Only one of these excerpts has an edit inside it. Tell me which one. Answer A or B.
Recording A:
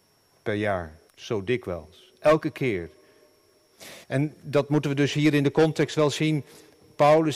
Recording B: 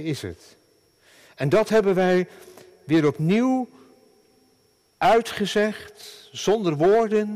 A